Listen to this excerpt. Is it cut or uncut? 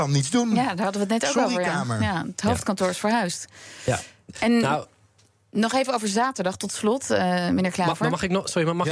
uncut